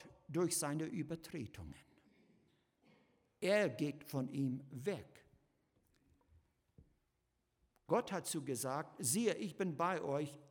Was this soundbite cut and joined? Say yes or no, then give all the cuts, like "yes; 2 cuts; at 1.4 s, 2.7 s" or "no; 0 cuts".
no; 0 cuts